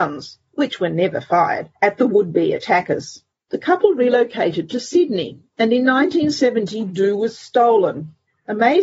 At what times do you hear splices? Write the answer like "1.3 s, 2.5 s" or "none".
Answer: 1.8 s, 3.4 s